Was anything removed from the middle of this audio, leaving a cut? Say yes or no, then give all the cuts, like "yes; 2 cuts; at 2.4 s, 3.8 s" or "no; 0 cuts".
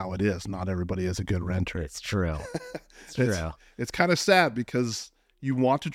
no; 0 cuts